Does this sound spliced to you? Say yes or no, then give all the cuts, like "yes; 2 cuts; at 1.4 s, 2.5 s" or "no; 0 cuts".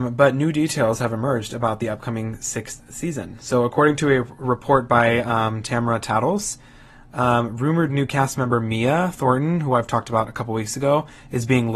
no; 0 cuts